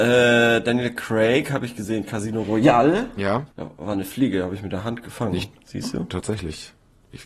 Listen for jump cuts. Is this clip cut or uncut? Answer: cut